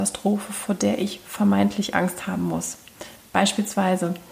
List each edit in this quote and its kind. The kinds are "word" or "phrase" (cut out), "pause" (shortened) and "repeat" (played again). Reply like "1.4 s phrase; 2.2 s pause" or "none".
none